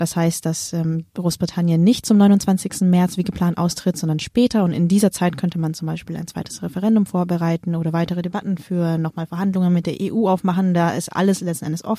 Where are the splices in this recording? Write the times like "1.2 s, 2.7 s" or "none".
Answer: 1.1 s